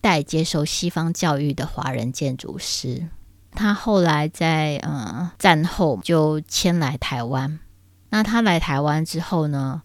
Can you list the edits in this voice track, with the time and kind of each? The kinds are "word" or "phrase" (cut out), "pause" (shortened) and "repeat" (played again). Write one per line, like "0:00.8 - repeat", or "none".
none